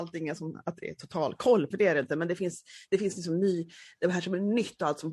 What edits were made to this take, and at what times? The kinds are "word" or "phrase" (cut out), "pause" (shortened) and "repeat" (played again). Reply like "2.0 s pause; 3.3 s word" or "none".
1.7 s word